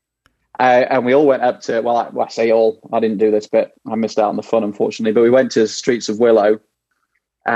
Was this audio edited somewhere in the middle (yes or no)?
no